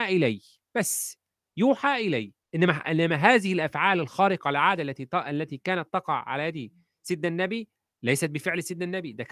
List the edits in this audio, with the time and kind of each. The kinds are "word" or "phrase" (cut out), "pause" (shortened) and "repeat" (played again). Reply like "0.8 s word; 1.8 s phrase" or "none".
2.4 s pause